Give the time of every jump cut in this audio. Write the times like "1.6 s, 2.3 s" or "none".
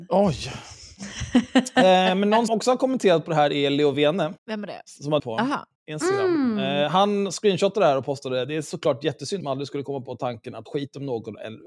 2.5 s, 4.4 s, 5.2 s, 5.8 s, 9.4 s, 10.7 s